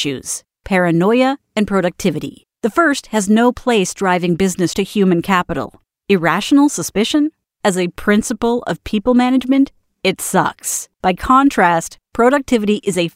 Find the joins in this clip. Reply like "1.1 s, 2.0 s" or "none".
4.7 s, 10.9 s